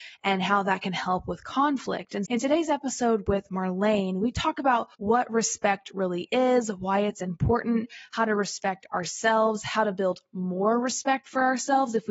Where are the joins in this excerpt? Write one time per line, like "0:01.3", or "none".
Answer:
0:02.3
0:04.9